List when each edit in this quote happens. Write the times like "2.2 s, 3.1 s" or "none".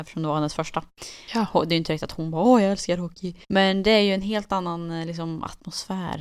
3.4 s

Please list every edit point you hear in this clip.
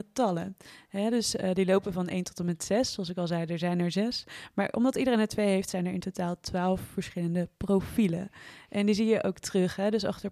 none

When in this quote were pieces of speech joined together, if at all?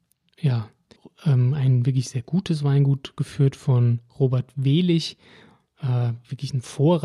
1.0 s

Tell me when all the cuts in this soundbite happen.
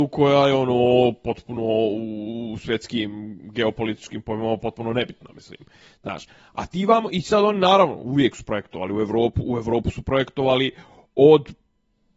none

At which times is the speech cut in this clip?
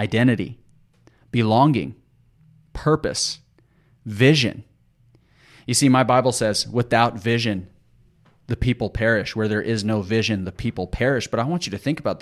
none

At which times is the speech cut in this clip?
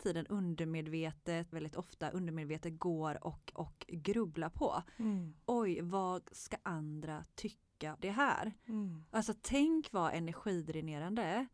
1.5 s, 3.5 s, 8.0 s

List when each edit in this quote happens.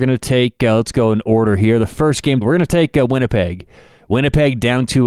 2.4 s

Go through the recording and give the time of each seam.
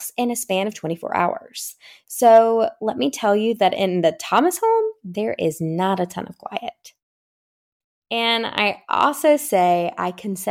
none

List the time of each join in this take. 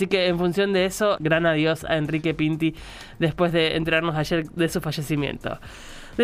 1.2 s

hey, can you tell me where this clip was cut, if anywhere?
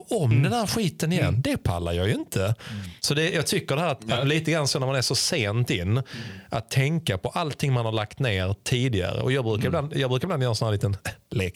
3.0 s, 4.2 s

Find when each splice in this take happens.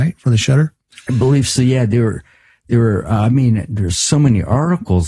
none

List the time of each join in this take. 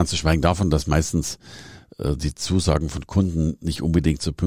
none

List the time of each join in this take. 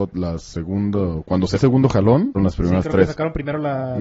1.5 s, 2.3 s

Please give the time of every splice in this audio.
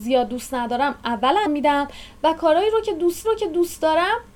1.5 s, 3.2 s

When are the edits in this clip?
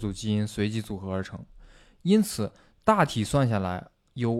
none

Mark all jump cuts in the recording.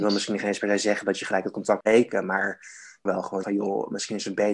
1.8 s, 3.1 s, 3.4 s

